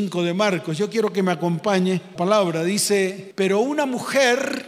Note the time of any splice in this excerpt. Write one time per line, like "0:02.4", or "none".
0:02.2